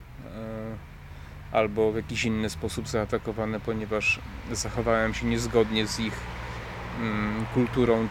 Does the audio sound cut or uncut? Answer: uncut